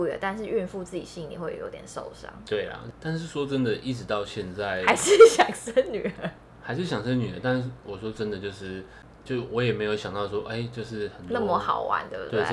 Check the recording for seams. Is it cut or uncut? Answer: uncut